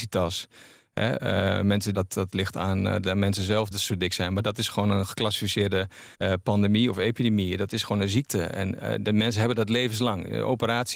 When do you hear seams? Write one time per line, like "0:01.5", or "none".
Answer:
0:01.9
0:03.7
0:06.1

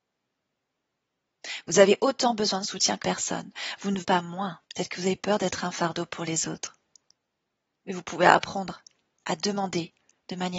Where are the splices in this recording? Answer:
0:03.0
0:04.0
0:04.6

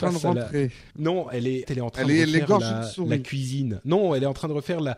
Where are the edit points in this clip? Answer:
0:00.9
0:01.6

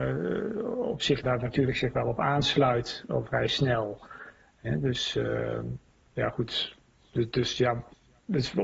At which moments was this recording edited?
0:01.2

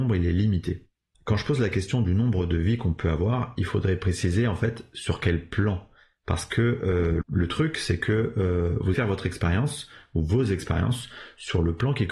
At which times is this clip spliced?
0:01.1
0:07.2
0:08.9

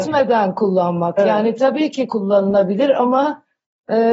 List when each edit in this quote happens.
none

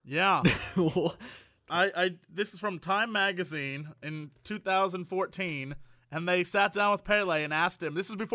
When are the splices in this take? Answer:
none

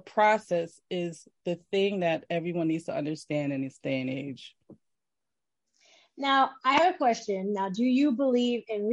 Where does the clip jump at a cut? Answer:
none

